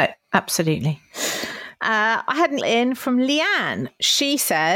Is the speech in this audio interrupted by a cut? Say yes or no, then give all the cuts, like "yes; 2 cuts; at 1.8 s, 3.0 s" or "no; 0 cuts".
yes; 1 cut; at 2.6 s